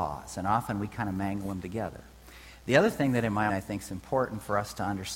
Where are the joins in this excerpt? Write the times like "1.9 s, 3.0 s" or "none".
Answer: 3.5 s